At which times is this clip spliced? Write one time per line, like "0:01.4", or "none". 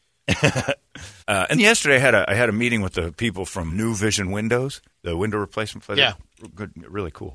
0:01.2
0:01.5
0:03.7
0:04.9